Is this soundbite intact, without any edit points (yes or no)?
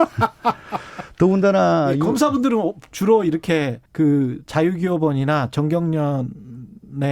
no